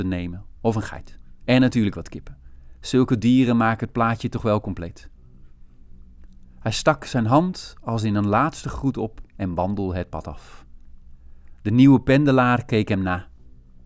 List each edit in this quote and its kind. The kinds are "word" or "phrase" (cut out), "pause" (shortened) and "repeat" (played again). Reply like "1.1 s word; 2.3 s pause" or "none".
none